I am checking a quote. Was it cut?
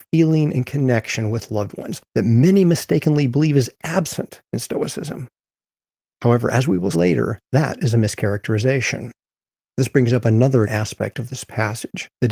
yes; 3 cuts; at 2.1 s, 6.9 s, 10.7 s

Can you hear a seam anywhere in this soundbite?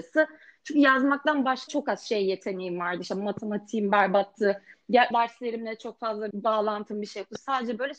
yes; 3 cuts; at 1.7 s, 5.1 s, 6.3 s

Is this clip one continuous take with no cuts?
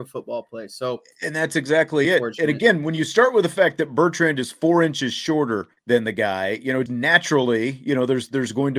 no; 3 cuts; at 2.0 s, 5.8 s, 6.9 s

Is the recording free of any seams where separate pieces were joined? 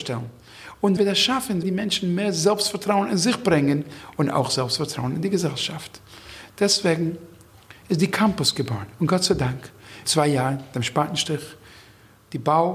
no; 3 cuts; at 1.0 s, 1.6 s, 10.0 s

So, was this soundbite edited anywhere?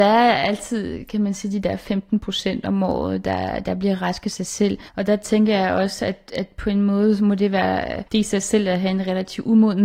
yes; 2 cuts; at 4.9 s, 8.1 s

